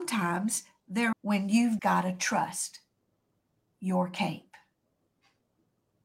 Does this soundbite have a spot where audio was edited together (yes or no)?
yes